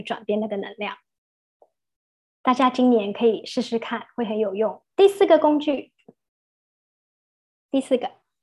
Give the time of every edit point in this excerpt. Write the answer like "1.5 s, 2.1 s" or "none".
4.9 s